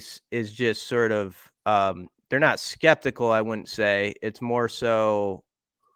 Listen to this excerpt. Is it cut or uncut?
uncut